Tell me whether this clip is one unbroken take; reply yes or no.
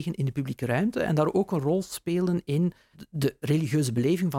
yes